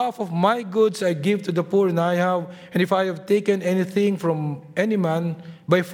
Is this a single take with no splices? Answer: yes; 0 cuts

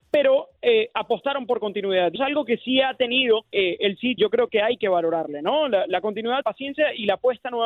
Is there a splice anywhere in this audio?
yes; 4 cuts; at 2.2 s, 3.5 s, 4.2 s, 6.4 s

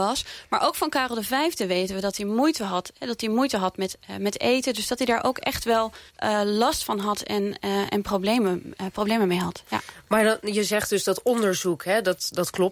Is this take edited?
yes; 1 cut; at 6.1 s

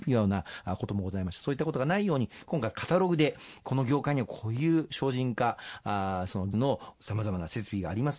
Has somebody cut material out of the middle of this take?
yes; 1 cut; at 6.5 s

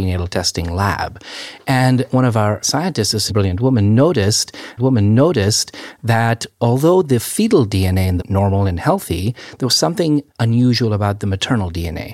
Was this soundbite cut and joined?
yes; 4 cuts; at 3.3 s, 4.8 s, 8.2 s, 10.3 s

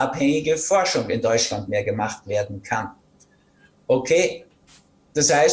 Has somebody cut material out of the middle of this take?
no; 0 cuts

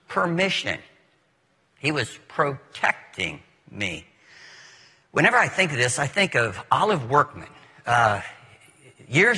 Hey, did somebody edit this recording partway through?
no; 0 cuts

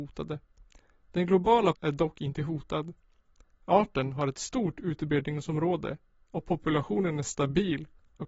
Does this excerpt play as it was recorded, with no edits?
no; 2 cuts; at 1.7 s, 4.3 s

